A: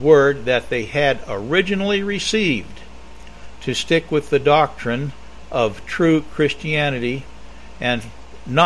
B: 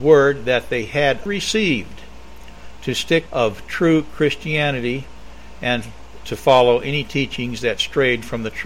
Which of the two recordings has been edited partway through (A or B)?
B